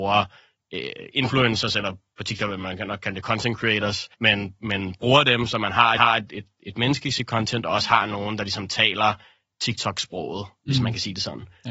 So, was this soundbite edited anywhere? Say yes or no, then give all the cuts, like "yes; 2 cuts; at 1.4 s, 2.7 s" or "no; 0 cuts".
yes; 2 cuts; at 4.1 s, 6.0 s